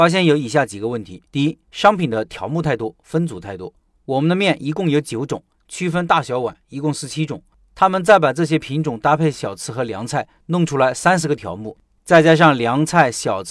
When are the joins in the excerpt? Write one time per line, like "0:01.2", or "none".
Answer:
0:01.3
0:01.6